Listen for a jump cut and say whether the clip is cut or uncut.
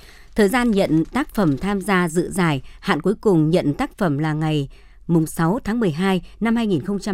uncut